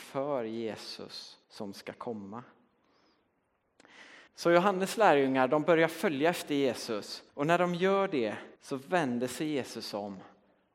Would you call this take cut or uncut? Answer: cut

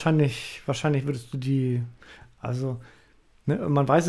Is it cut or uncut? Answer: uncut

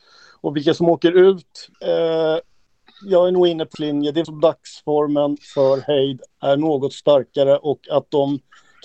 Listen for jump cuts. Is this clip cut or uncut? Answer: cut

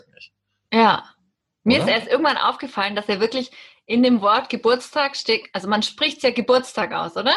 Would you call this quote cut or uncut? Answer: uncut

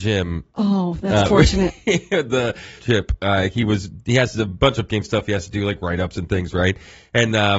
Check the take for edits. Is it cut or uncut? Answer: cut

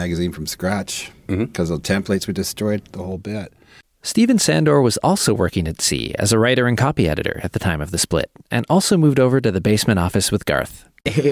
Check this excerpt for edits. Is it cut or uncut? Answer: uncut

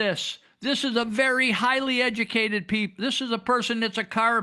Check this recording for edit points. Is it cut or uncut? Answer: uncut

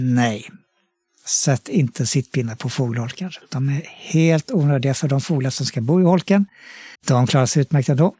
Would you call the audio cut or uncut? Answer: cut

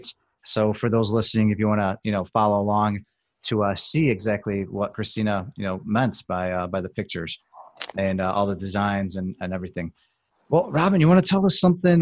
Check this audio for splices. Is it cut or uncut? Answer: uncut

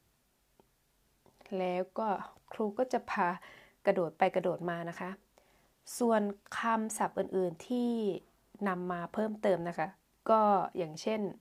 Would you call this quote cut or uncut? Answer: cut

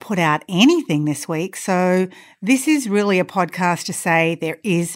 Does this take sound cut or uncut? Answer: uncut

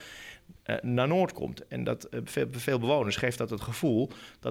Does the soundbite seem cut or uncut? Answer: uncut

